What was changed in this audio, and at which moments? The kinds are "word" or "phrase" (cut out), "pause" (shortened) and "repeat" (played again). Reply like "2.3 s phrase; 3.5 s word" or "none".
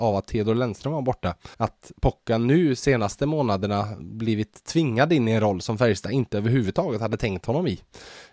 1.5 s pause